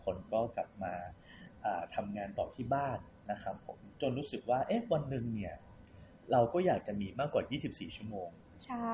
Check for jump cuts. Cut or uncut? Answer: cut